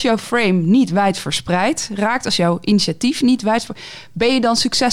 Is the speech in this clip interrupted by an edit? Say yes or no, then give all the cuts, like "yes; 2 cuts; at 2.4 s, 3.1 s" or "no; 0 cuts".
no; 0 cuts